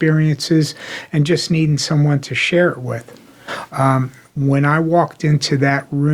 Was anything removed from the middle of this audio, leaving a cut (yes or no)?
no